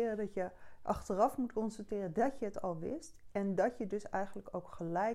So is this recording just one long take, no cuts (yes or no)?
yes